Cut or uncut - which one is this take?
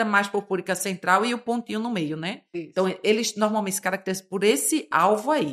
uncut